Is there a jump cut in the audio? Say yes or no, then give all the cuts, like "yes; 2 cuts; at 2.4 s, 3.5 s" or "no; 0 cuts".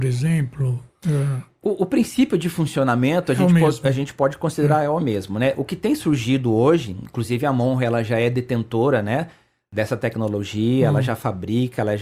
no; 0 cuts